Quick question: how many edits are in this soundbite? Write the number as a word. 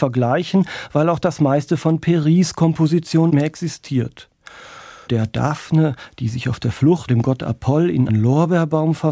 four